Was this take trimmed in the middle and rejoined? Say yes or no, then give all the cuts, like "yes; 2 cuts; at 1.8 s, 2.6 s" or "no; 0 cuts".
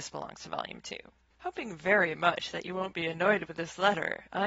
yes; 1 cut; at 1.3 s